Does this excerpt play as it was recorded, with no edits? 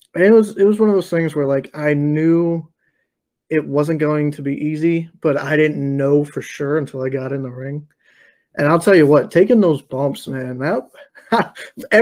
yes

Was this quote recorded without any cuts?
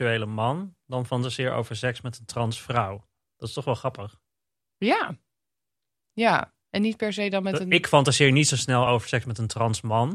yes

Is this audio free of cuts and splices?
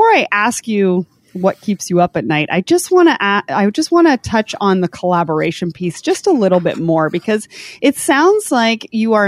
yes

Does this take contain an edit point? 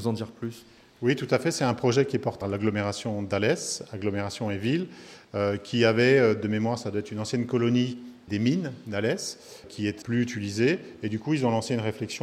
yes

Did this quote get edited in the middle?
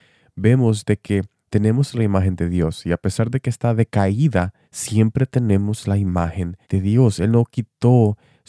yes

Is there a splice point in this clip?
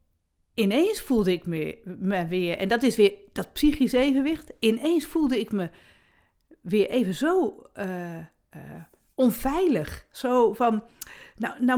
no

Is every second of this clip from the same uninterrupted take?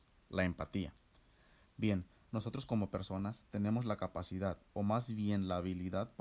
yes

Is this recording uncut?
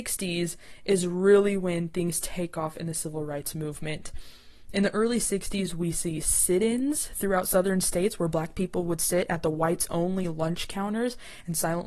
yes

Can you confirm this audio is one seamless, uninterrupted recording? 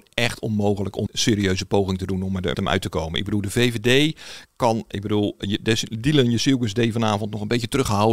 no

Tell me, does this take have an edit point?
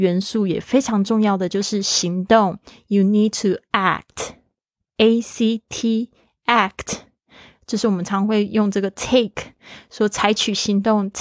no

